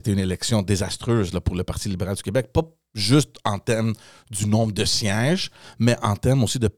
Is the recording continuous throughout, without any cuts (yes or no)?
yes